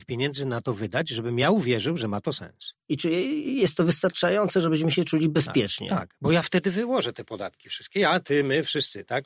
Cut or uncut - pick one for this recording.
uncut